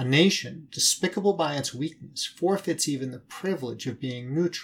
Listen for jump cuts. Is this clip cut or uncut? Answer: uncut